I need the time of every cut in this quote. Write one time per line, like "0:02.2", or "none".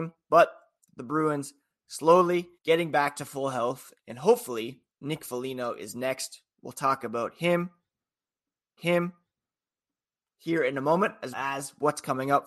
0:02.6
0:04.9
0:08.8
0:11.3